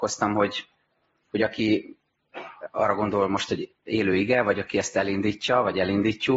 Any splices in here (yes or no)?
no